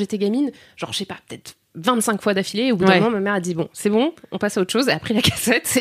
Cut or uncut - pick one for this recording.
uncut